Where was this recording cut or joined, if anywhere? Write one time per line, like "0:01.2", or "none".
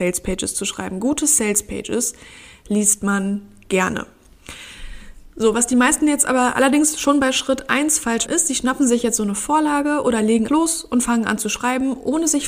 0:08.3
0:10.5